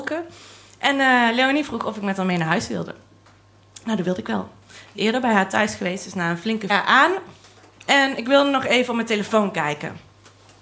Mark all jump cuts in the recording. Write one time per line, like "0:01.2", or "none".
0:04.9
0:06.7